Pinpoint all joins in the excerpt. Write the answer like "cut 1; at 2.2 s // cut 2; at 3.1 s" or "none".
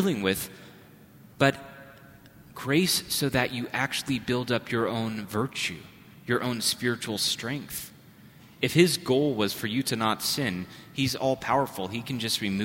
none